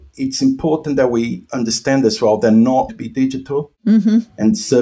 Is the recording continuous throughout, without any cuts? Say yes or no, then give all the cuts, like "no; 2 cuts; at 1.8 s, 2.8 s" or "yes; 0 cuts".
no; 1 cut; at 2.9 s